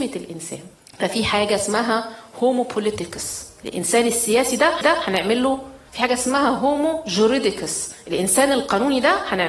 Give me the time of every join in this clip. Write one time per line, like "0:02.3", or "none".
0:04.8
0:05.9